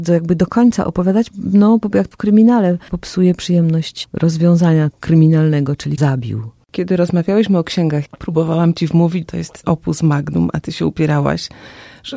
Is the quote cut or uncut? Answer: cut